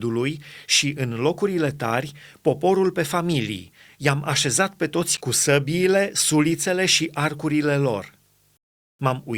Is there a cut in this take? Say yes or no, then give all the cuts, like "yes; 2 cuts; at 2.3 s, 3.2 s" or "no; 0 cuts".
no; 0 cuts